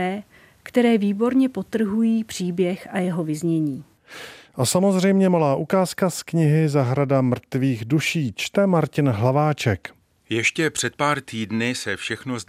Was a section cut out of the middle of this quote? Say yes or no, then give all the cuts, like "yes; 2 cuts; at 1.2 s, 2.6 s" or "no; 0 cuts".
no; 0 cuts